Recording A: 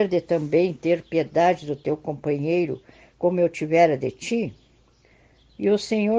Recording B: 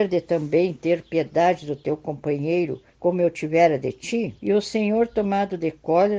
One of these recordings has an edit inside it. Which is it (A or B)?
B